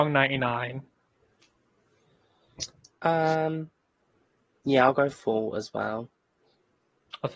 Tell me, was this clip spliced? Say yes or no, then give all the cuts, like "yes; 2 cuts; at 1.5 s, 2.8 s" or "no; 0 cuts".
no; 0 cuts